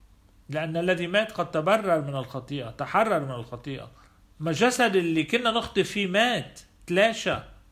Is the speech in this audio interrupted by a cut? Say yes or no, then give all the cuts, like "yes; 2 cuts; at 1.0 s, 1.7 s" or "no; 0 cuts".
yes; 1 cut; at 4.1 s